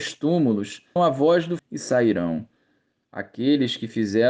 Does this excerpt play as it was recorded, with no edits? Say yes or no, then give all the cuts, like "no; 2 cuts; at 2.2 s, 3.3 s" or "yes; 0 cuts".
no; 2 cuts; at 1.0 s, 1.6 s